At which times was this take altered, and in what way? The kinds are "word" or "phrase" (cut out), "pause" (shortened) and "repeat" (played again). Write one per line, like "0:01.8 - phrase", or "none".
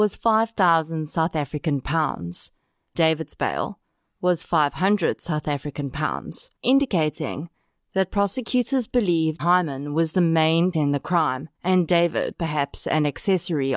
0:02.9 - word
0:06.6 - pause
0:09.4 - word
0:10.7 - word
0:11.5 - pause
0:12.3 - word